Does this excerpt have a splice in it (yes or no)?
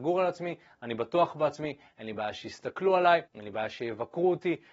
yes